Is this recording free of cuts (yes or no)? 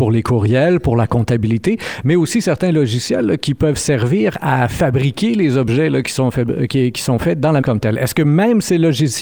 no